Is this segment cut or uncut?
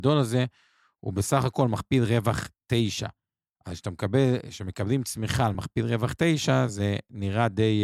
uncut